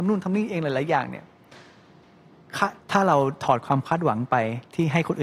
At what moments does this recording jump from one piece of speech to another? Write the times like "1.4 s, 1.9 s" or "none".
2.8 s